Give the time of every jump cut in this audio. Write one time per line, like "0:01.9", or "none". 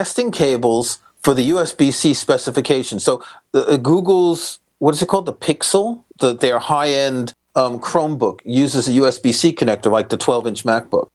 0:01.1
0:06.1
0:07.4